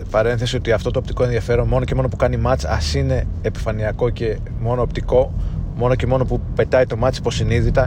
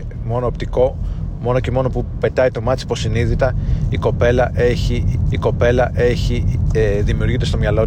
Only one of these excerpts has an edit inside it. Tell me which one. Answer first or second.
second